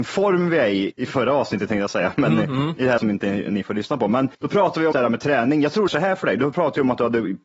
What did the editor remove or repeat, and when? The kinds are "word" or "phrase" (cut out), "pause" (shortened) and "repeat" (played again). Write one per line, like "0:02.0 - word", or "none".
0:00.9 - word
0:03.0 - word
0:04.3 - pause
0:04.9 - word
0:05.9 - phrase